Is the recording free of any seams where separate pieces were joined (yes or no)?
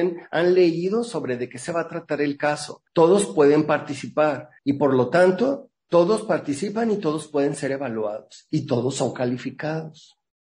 no